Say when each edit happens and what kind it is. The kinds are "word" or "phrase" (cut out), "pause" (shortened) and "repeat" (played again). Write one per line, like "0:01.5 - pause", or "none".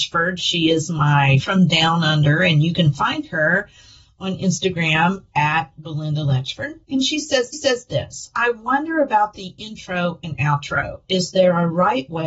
0:01.4 - word
0:06.8 - pause
0:07.5 - repeat